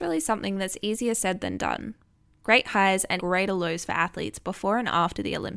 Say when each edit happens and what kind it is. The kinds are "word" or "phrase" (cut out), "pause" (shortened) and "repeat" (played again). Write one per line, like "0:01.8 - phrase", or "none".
0:03.2 - word